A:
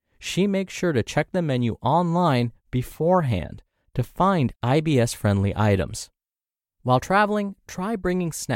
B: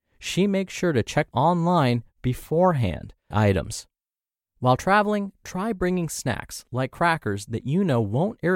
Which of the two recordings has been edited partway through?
B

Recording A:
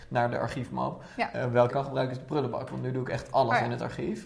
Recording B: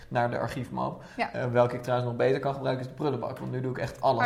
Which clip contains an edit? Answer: A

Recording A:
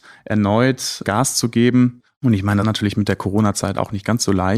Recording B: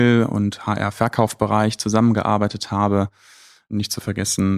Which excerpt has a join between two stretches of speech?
A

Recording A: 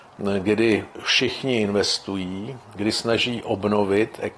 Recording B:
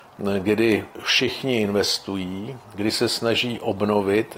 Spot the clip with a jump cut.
A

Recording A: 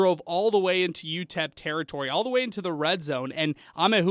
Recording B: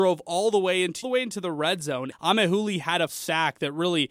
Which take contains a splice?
B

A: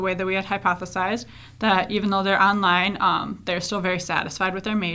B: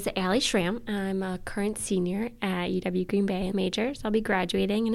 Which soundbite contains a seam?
B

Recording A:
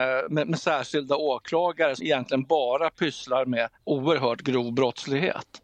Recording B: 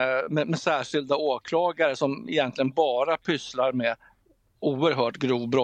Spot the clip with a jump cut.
A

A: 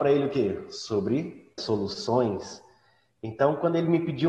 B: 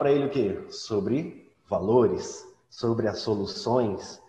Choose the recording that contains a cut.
A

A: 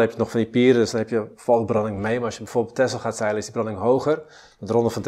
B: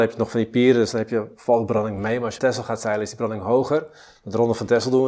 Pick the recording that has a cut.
B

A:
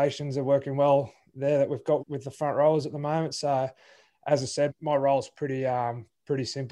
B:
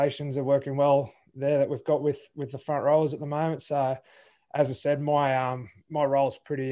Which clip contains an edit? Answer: A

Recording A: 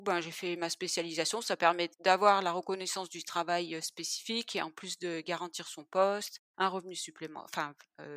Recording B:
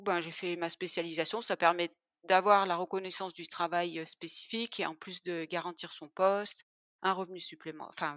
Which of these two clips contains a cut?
A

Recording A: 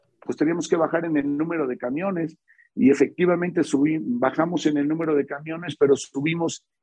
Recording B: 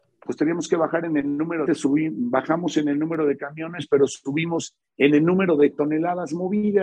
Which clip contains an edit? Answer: B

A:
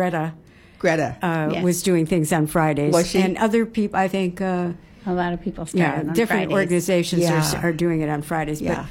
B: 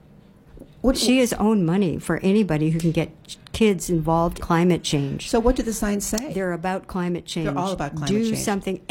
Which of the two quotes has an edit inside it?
B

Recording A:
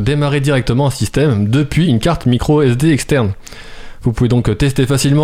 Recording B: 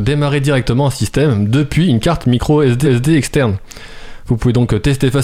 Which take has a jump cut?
B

